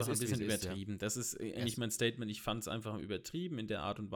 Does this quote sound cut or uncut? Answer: uncut